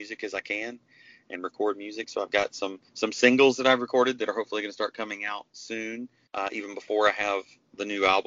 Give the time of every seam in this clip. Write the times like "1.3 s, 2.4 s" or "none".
2.9 s, 6.3 s